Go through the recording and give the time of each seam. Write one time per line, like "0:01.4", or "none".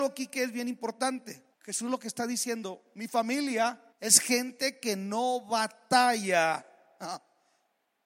0:01.5
0:03.9